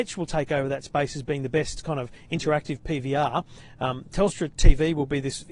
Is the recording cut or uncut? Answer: uncut